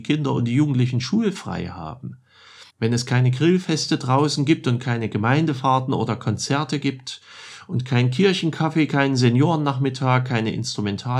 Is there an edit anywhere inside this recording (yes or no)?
yes